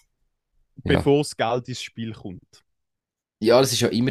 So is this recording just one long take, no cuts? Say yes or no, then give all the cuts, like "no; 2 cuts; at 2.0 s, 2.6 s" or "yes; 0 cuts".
yes; 0 cuts